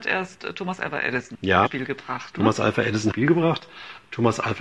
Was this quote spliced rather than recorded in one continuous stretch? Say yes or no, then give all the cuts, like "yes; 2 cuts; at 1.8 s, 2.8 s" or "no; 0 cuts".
yes; 2 cuts; at 1.7 s, 3.1 s